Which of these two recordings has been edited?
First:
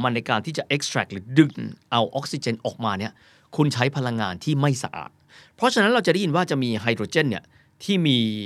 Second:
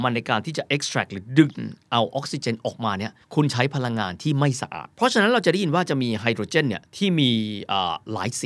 second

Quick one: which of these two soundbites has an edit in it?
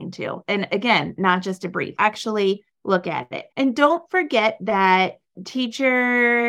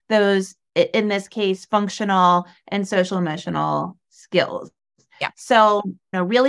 first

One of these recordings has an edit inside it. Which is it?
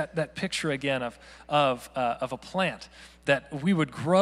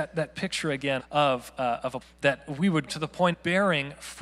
second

